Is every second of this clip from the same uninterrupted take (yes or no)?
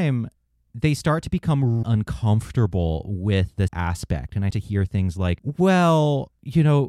no